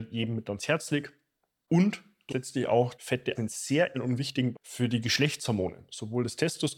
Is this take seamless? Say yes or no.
no